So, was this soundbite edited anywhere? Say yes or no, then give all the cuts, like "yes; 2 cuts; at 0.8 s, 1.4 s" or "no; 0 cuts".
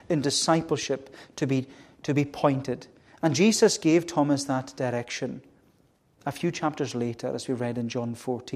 no; 0 cuts